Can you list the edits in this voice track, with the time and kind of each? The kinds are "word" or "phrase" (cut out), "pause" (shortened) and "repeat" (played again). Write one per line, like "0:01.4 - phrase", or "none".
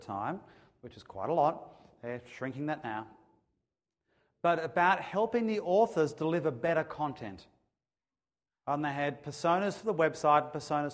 none